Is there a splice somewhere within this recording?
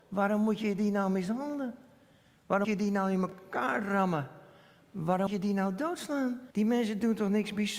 yes; 3 cuts; at 2.6 s, 5.3 s, 6.5 s

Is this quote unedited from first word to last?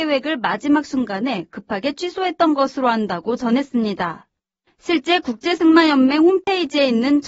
yes; 0 cuts

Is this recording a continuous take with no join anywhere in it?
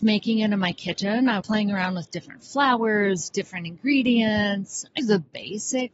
no; 2 cuts; at 1.4 s, 5.0 s

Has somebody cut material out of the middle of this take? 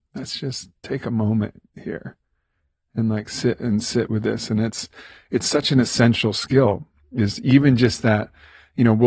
no; 0 cuts

